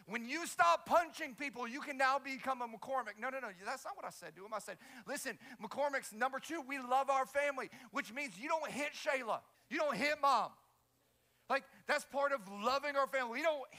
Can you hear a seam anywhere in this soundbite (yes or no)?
yes